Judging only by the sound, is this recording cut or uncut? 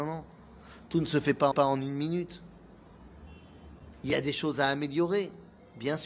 cut